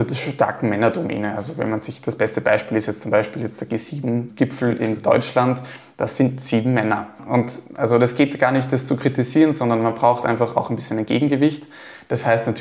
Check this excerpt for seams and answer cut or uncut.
uncut